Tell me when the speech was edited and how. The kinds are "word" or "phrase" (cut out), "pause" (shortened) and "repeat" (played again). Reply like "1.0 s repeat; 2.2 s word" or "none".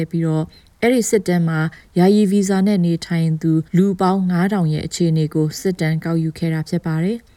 3.7 s pause